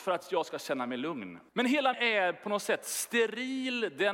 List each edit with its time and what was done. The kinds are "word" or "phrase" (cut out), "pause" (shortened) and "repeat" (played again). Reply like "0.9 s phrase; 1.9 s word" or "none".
1.5 s pause; 1.9 s word